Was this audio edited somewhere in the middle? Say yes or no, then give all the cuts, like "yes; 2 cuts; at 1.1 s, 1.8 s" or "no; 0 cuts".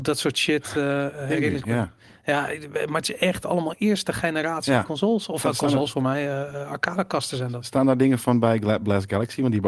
no; 0 cuts